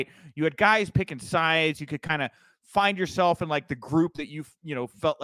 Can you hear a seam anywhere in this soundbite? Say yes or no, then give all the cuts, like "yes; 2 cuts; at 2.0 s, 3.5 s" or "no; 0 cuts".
no; 0 cuts